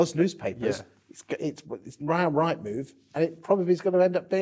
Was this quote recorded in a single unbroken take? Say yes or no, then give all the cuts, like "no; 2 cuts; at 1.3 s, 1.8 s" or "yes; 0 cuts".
yes; 0 cuts